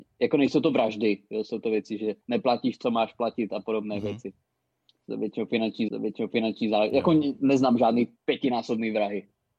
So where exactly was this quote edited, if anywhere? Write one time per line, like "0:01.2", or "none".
0:02.2
0:04.5
0:05.9
0:08.2